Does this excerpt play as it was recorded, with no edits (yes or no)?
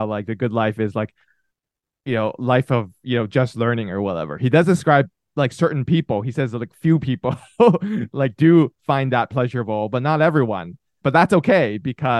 yes